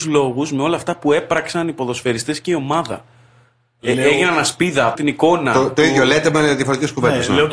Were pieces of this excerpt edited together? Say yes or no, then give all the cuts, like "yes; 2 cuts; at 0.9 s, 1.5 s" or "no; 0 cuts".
yes; 1 cut; at 5.0 s